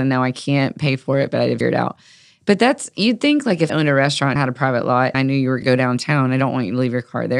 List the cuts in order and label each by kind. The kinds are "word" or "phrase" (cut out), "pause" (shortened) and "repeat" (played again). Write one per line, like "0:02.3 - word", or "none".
0:01.6 - word
0:03.7 - word
0:04.4 - word
0:05.1 - word
0:05.6 - word